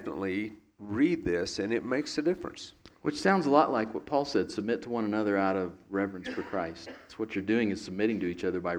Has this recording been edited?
no; 0 cuts

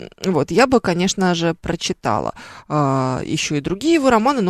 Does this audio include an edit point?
no; 0 cuts

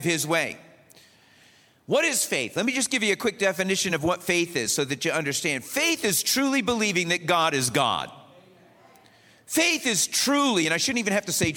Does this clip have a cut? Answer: no; 0 cuts

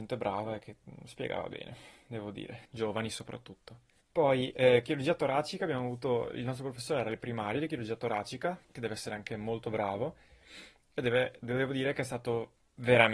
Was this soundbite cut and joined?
yes; 3 cuts; at 2.6 s, 4.0 s, 8.6 s

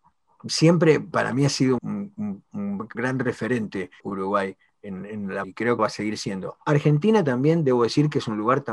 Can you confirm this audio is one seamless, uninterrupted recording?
no; 6 cuts; at 1.1 s, 1.8 s, 2.9 s, 4.0 s, 5.4 s, 5.8 s

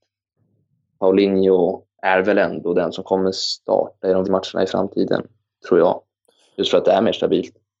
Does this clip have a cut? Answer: yes; 1 cut; at 4.2 s

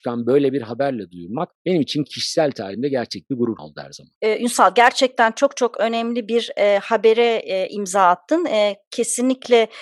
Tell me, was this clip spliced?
yes; 3 cuts; at 1.5 s, 3.6 s, 4.2 s

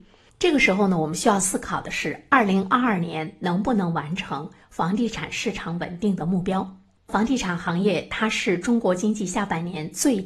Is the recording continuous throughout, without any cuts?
yes; 0 cuts

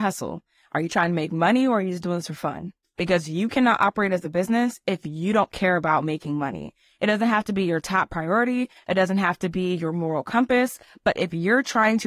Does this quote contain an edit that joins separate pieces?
no; 0 cuts

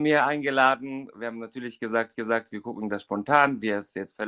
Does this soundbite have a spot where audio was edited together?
yes; 1 cut; at 2.1 s

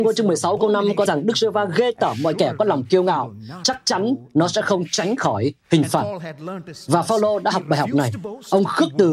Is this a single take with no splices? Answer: no; 1 cut; at 1.1 s

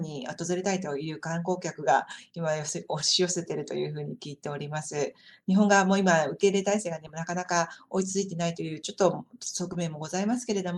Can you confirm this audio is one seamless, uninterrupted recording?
yes; 0 cuts

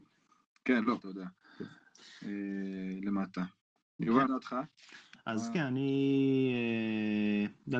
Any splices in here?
yes; 2 cuts; at 1.0 s, 4.3 s

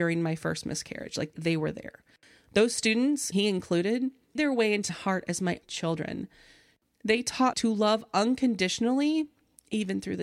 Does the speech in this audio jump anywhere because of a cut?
yes; 6 cuts; at 1.3 s, 3.3 s, 4.4 s, 4.9 s, 5.6 s, 7.5 s

